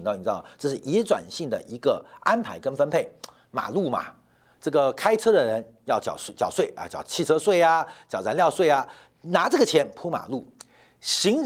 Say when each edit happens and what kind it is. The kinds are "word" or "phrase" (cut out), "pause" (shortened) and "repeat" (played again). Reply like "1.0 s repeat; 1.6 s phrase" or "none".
none